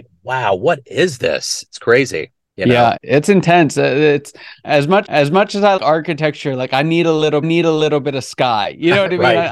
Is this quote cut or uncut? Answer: cut